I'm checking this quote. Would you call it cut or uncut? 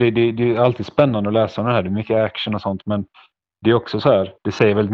uncut